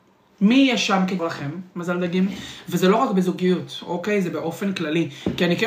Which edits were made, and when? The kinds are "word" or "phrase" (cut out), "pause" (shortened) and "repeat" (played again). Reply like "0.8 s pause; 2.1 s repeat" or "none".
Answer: 1.2 s word

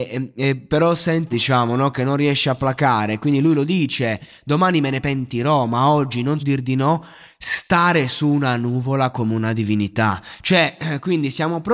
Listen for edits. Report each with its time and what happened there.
1.3 s word; 6.4 s word

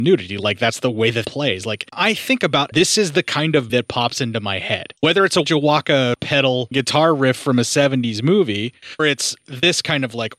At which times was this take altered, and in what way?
1.2 s word; 1.9 s word; 2.7 s word; 3.7 s word; 5.4 s word; 6.2 s word; 6.7 s word; 9.0 s word

